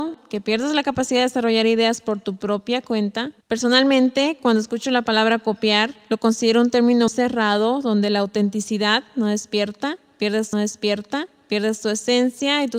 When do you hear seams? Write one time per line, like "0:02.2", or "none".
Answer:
0:03.4
0:07.1
0:10.5